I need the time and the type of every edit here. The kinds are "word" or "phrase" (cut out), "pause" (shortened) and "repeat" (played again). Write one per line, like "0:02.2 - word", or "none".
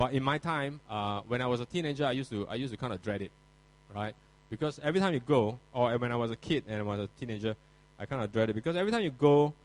none